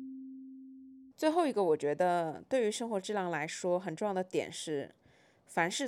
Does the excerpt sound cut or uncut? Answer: cut